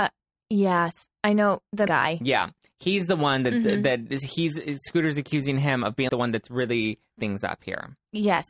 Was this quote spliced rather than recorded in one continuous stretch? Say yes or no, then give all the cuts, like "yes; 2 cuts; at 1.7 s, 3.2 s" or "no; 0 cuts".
yes; 3 cuts; at 1.9 s, 6.1 s, 7.2 s